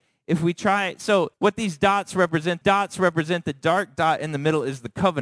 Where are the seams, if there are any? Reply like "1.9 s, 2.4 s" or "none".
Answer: 1.3 s, 2.6 s